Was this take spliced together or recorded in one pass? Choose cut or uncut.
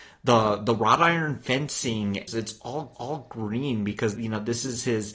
cut